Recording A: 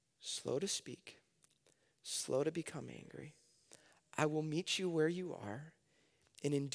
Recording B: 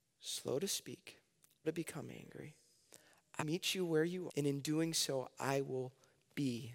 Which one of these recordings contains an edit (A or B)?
B